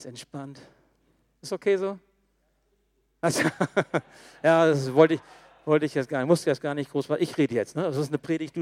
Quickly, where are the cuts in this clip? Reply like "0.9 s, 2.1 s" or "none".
none